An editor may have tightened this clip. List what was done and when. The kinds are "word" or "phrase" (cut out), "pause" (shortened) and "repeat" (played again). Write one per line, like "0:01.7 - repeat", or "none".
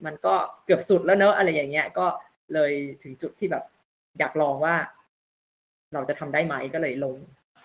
none